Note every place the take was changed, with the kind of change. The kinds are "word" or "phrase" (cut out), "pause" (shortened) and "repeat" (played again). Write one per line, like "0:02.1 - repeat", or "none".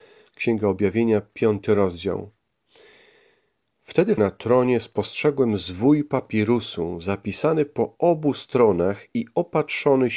0:04.2 - phrase